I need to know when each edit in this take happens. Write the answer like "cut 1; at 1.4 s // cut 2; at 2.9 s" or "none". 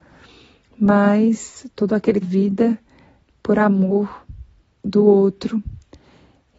cut 1; at 2.2 s // cut 2; at 4.6 s